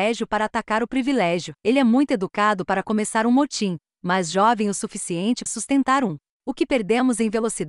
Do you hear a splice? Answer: yes; 2 cuts; at 1.6 s, 5.5 s

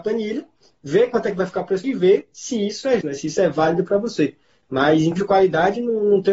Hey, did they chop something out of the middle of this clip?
yes; 3 cuts; at 1.8 s, 3.0 s, 5.2 s

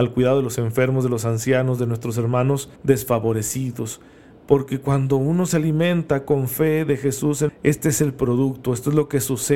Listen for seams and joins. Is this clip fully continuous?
no; 2 cuts; at 2.8 s, 7.5 s

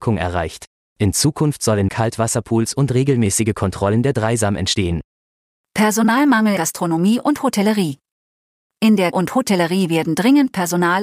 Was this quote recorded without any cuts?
no; 3 cuts; at 1.9 s, 6.6 s, 9.1 s

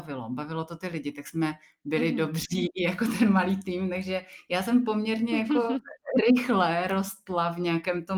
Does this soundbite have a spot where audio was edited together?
no; 0 cuts

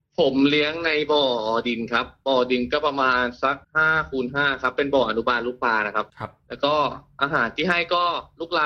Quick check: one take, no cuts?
no; 2 cuts; at 3.6 s, 6.1 s

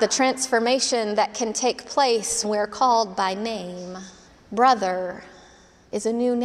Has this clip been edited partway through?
yes; 2 cuts; at 2.4 s, 4.3 s

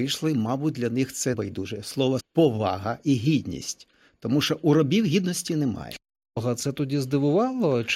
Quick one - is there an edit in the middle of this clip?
yes; 2 cuts; at 1.3 s, 2.2 s

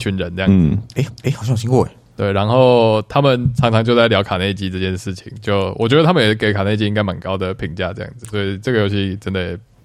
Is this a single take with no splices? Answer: no; 1 cut; at 1.1 s

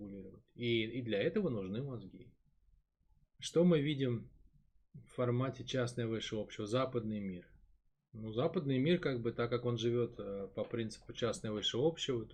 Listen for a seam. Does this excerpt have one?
no; 0 cuts

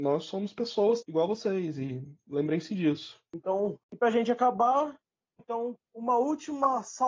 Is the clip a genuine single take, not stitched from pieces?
no; 4 cuts; at 1.0 s, 3.8 s, 5.4 s, 5.8 s

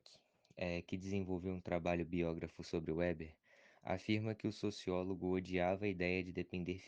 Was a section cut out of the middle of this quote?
no; 0 cuts

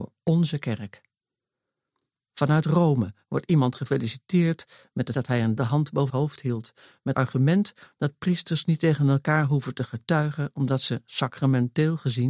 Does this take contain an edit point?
yes; 4 cuts; at 5.1 s, 5.6 s, 6.1 s, 7.1 s

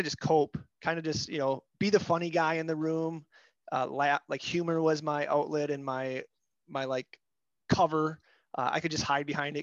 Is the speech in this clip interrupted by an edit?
no; 0 cuts

